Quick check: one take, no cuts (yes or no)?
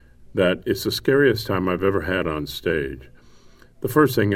yes